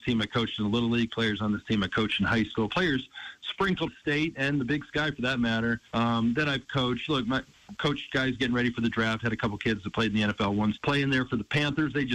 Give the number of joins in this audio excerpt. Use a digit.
3